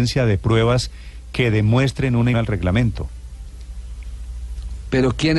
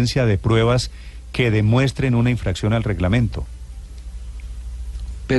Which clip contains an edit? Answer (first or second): first